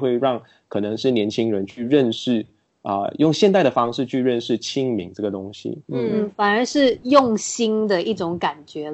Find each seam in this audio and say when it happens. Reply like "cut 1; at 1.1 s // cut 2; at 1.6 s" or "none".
none